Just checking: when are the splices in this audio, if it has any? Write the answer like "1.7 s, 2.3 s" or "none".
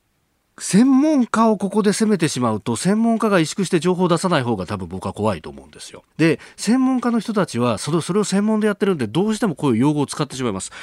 6.1 s